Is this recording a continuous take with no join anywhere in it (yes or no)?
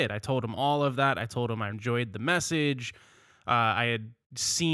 no